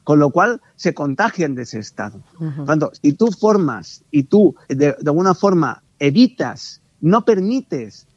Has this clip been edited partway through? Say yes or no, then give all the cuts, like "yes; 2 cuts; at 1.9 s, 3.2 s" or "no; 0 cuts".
yes; 2 cuts; at 4.6 s, 6.9 s